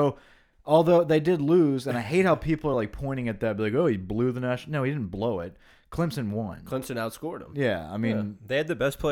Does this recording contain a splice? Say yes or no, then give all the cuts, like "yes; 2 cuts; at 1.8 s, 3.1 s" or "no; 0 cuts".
no; 0 cuts